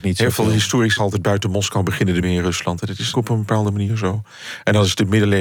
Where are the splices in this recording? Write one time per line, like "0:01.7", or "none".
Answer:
0:01.0
0:02.2
0:03.1